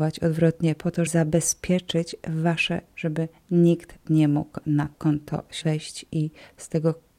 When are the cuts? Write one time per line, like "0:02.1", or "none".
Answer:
0:01.1
0:02.9
0:04.1
0:04.6
0:04.9
0:05.6